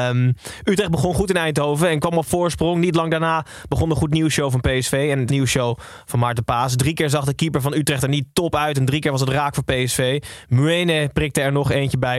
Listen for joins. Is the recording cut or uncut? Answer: cut